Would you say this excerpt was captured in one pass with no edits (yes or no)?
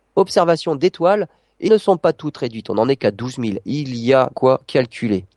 no